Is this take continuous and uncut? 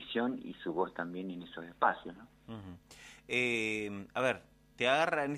yes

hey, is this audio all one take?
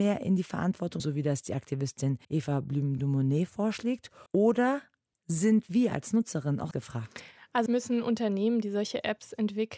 no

